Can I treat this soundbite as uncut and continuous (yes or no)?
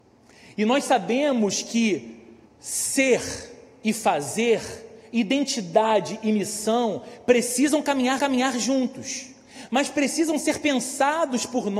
no